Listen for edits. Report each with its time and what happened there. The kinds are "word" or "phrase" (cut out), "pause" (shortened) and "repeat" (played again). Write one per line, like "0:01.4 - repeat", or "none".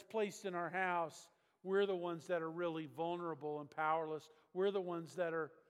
none